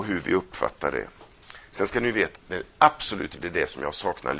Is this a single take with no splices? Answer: no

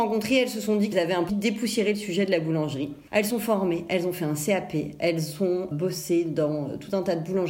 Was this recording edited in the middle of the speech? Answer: yes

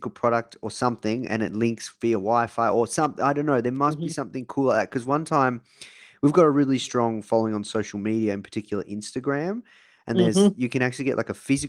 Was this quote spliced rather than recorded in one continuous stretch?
no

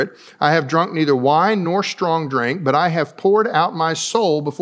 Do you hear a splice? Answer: no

